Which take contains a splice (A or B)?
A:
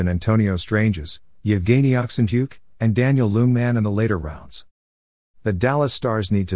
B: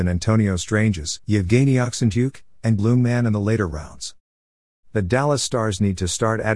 B